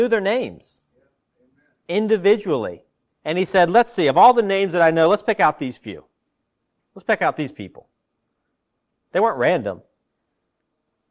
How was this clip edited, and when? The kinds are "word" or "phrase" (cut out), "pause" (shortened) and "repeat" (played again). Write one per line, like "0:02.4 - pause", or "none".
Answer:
none